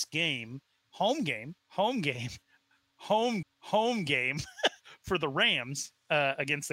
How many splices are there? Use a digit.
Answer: 2